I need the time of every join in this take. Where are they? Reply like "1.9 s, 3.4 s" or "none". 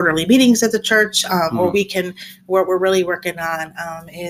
none